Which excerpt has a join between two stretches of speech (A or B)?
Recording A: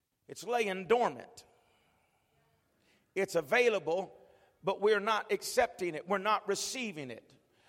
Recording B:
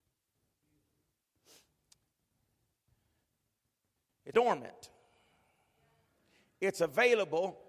B